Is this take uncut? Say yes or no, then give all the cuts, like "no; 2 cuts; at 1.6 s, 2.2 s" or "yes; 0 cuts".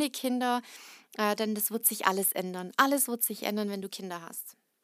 yes; 0 cuts